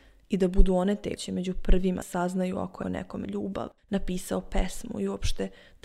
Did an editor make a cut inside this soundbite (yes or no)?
yes